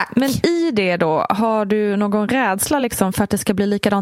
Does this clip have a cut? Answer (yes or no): no